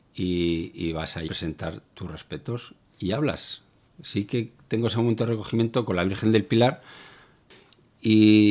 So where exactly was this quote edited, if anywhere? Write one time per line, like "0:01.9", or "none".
0:01.3